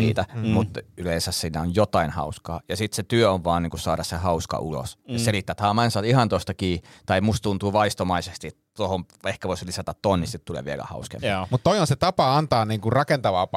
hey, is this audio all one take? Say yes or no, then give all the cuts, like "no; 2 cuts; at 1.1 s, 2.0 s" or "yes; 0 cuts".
yes; 0 cuts